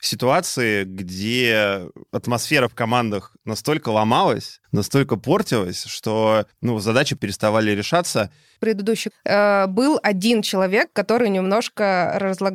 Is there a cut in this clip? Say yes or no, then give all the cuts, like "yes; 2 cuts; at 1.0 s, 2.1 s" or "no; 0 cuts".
yes; 4 cuts; at 4.6 s, 6.5 s, 7.2 s, 9.1 s